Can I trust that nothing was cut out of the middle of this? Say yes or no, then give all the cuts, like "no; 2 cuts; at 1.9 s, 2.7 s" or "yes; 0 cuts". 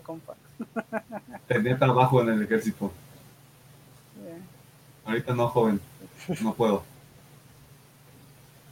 yes; 0 cuts